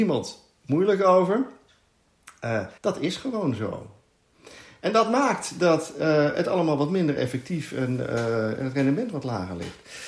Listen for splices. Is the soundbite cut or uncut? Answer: cut